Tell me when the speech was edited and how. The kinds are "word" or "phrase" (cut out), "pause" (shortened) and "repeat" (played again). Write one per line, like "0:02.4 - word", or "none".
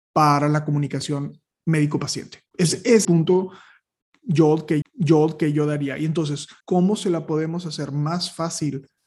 0:02.5 - pause
0:03.0 - phrase
0:04.8 - repeat
0:06.6 - pause